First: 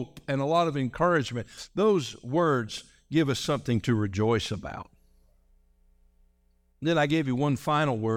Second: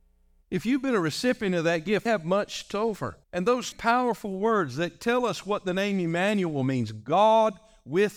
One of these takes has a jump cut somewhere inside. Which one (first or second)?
second